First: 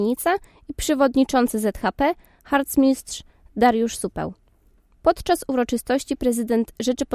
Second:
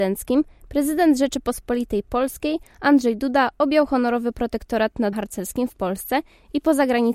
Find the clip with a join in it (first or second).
second